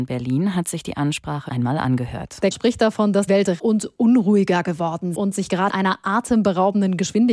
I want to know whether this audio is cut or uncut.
cut